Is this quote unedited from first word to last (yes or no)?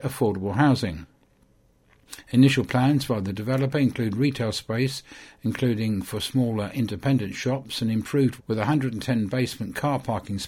no